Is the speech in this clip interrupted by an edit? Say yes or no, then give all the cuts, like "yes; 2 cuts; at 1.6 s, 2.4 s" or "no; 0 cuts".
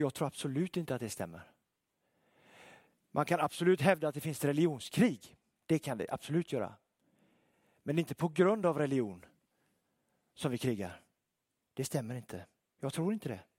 no; 0 cuts